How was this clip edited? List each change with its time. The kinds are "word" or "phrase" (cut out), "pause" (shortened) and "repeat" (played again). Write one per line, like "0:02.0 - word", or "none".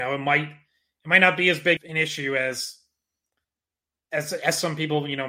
0:01.8 - word